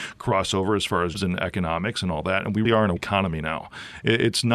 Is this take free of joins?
no; 3 cuts; at 1.1 s, 2.6 s, 3.0 s

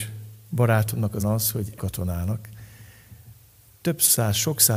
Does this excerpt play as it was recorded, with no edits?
no; 2 cuts; at 1.2 s, 1.8 s

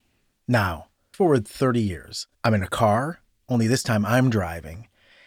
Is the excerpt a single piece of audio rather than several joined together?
no; 2 cuts; at 1.1 s, 2.3 s

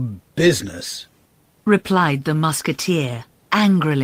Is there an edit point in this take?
no; 0 cuts

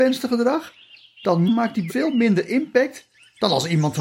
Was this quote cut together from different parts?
yes; 2 cuts; at 1.5 s, 1.9 s

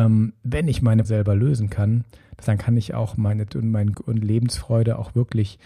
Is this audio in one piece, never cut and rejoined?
no; 4 cuts; at 1.0 s, 2.4 s, 3.5 s, 3.9 s

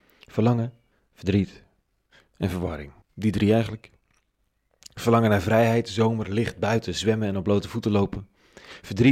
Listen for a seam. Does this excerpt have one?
yes; 2 cuts; at 0.9 s, 3.0 s

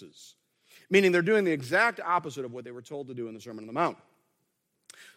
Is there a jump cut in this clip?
no; 0 cuts

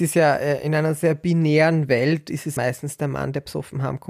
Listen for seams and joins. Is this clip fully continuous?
no; 1 cut; at 2.6 s

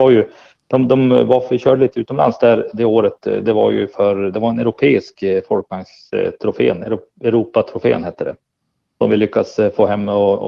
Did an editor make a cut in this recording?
no; 0 cuts

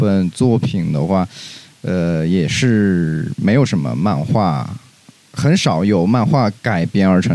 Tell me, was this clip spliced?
no; 0 cuts

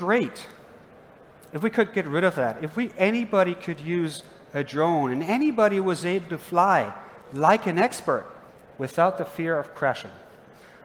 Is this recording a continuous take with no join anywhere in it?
no; 1 cut; at 8.5 s

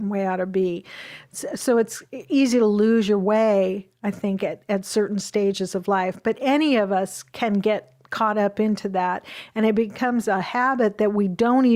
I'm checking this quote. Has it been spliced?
no; 0 cuts

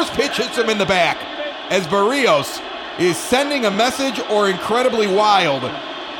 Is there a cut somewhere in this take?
no; 0 cuts

